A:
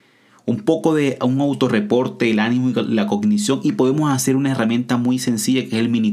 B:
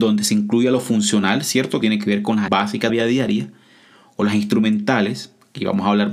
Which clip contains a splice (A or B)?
B